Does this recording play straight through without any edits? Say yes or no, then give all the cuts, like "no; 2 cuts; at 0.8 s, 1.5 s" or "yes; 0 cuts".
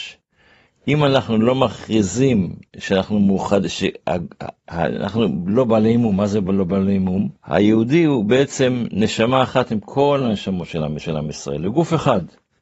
no; 3 cuts; at 2.7 s, 7.4 s, 11.0 s